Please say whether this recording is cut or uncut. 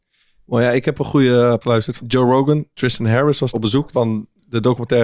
cut